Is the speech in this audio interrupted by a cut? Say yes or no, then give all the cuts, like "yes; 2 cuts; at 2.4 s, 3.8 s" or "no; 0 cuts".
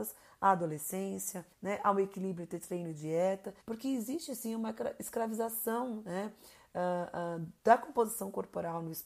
yes; 3 cuts; at 1.5 s, 3.6 s, 7.6 s